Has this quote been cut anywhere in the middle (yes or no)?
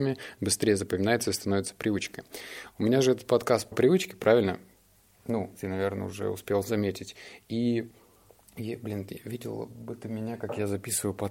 yes